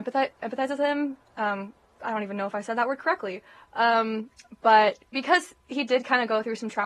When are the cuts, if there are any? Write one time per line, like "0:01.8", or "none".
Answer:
none

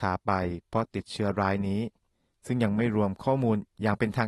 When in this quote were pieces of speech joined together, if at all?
none

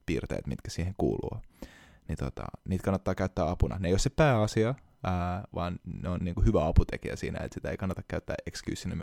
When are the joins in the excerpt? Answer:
none

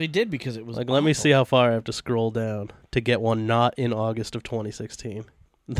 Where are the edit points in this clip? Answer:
0:02.8

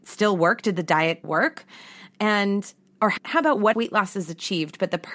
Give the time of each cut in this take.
0:01.2
0:03.2
0:03.7

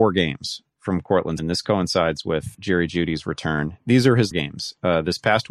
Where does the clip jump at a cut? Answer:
0:01.4
0:02.5
0:04.3

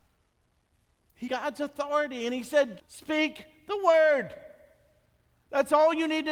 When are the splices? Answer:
0:01.3
0:02.8

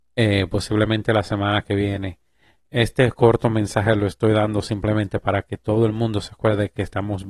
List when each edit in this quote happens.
none

